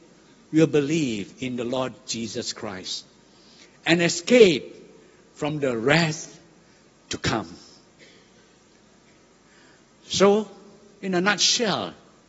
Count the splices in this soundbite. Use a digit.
0